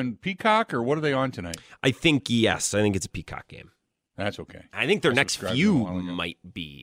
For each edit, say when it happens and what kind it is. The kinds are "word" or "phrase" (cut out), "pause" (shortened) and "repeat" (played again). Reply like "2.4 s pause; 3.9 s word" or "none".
none